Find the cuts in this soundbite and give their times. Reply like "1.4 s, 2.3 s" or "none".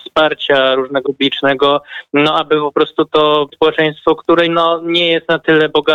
1.0 s, 3.5 s, 4.5 s